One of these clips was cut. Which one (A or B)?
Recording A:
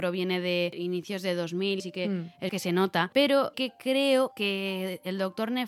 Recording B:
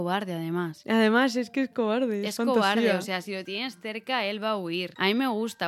A